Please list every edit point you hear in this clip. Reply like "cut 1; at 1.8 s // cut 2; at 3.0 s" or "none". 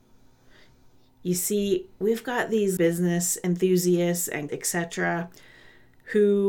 cut 1; at 2.8 s // cut 2; at 4.5 s